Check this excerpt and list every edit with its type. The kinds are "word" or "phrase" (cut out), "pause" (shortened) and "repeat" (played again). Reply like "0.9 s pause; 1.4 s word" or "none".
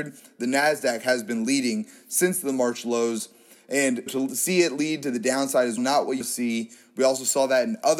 4.1 s word; 5.8 s word; 6.2 s word